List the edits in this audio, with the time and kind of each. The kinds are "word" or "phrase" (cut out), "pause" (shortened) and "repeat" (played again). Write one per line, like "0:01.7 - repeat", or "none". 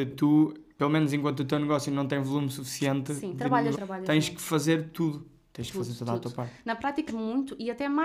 0:03.7 - word
0:07.1 - word